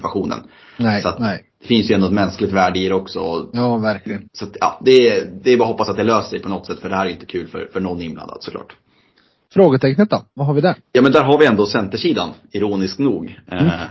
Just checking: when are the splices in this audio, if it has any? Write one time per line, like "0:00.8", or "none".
0:04.3
0:10.8